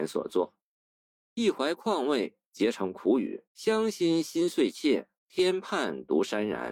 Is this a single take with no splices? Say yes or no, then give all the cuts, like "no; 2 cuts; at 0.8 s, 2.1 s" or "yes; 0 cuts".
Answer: no; 2 cuts; at 3.4 s, 5.2 s